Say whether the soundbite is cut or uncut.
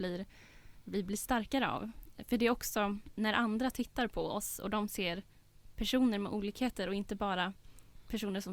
uncut